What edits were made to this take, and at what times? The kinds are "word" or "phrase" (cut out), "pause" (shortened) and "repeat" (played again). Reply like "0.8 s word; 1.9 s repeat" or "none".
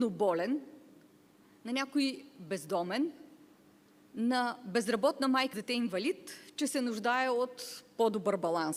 5.5 s word